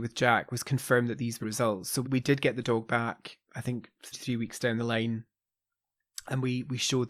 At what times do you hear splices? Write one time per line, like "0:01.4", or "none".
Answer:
0:01.4
0:02.0
0:04.1